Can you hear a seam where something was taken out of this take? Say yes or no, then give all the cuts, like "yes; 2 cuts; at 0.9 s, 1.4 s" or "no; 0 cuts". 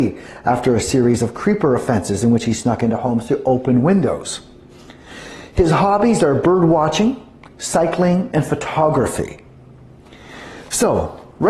no; 0 cuts